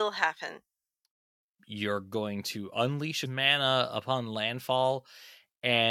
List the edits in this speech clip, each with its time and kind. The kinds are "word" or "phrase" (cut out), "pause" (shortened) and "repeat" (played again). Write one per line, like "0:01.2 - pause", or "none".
0:03.3 - phrase